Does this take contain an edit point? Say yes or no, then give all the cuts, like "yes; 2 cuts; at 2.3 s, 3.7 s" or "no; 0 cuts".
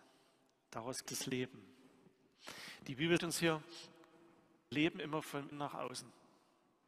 yes; 4 cuts; at 1.1 s, 3.2 s, 4.7 s, 5.5 s